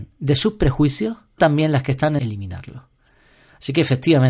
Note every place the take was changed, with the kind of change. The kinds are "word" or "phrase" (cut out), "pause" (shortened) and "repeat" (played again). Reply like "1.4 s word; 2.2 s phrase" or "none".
1.4 s word; 2.2 s phrase